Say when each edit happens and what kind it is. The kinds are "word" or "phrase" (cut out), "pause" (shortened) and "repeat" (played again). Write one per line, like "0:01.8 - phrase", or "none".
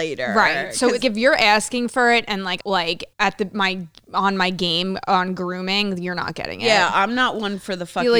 0:01.0 - word
0:02.6 - phrase
0:03.1 - pause